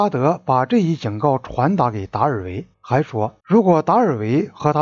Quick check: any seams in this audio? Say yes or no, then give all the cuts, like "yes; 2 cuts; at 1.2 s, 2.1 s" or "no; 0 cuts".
yes; 2 cuts; at 2.7 s, 3.4 s